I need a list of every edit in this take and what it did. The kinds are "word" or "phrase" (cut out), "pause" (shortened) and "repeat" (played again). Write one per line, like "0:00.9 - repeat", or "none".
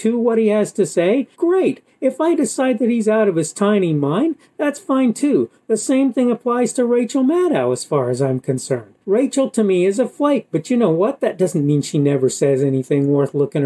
0:01.3 - pause
0:09.0 - pause